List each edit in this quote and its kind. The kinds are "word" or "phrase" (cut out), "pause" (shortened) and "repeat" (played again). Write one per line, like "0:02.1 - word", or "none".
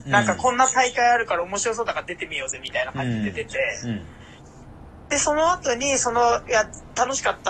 none